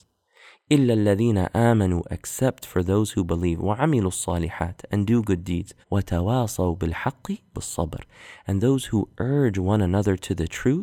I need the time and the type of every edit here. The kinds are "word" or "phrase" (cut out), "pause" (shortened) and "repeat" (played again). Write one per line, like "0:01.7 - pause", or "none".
0:05.8 - pause
0:07.5 - word

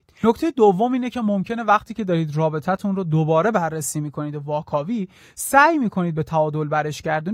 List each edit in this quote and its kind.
none

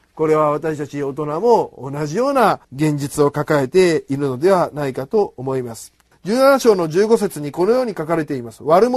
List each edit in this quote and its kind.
0:02.6 - pause
0:06.1 - pause

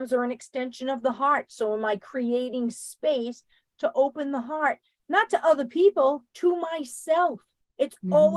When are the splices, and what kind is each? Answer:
0:06.3 - pause

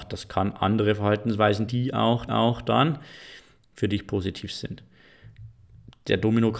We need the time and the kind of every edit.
0:01.7 - word
0:02.3 - repeat

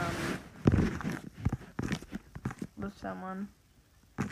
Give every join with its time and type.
0:02.8 - word

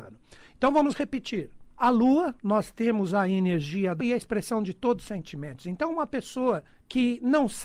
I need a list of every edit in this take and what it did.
0:01.7 - pause
0:02.4 - pause
0:04.0 - word
0:06.7 - pause

